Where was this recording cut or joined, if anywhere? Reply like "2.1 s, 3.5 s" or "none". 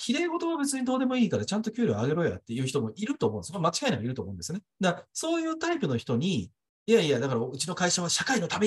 4.7 s, 6.7 s